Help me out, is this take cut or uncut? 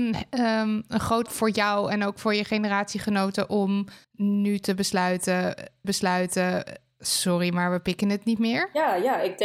cut